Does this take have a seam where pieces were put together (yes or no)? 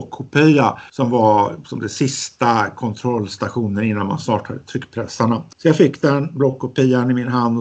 no